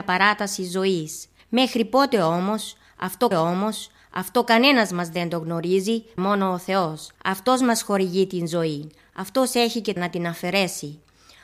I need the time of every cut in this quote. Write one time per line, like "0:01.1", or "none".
0:01.4
0:03.3
0:06.2
0:07.2
0:10.0